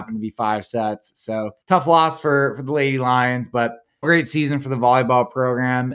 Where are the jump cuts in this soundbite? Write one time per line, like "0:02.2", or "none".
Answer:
0:01.6
0:04.0